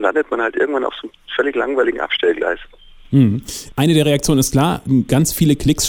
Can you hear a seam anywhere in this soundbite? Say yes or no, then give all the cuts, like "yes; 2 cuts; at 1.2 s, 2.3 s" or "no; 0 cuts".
no; 0 cuts